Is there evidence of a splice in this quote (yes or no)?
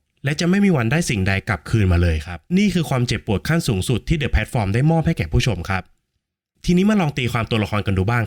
yes